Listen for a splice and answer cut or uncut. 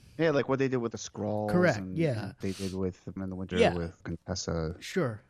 cut